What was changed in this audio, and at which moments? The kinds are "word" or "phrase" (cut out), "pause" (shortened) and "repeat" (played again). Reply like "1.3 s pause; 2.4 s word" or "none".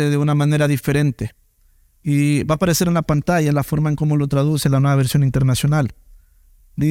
none